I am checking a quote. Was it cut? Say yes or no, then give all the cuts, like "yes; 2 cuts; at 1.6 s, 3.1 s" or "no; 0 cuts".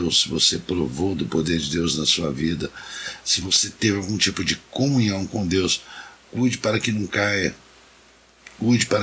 no; 0 cuts